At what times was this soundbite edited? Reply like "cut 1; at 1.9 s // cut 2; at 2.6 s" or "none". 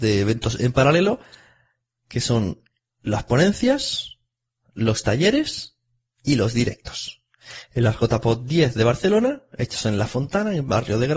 none

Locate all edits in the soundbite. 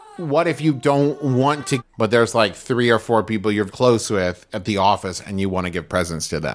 cut 1; at 1.8 s // cut 2; at 3.7 s

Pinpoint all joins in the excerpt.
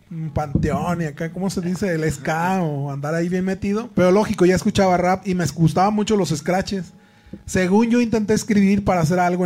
cut 1; at 3.9 s

